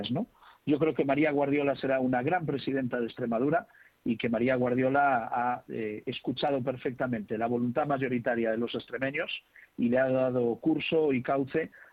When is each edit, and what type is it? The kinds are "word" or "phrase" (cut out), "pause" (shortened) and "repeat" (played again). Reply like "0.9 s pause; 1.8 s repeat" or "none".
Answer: none